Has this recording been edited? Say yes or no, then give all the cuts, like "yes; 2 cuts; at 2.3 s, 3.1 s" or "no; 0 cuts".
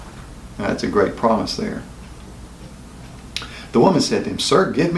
no; 0 cuts